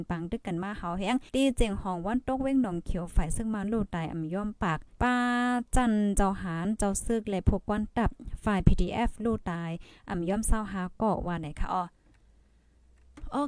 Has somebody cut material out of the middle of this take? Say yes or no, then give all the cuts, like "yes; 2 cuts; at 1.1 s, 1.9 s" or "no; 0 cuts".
yes; 2 cuts; at 1.3 s, 4.9 s